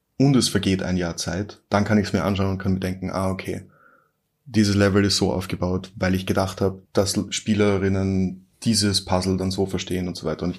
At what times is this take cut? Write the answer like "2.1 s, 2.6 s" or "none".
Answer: 6.8 s, 8.5 s